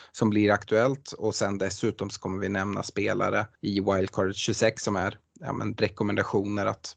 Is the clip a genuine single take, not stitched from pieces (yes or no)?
no